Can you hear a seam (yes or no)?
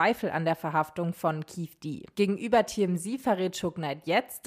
no